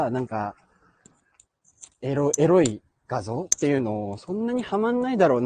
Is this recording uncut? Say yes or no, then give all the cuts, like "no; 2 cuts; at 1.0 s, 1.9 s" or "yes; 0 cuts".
no; 1 cut; at 1.9 s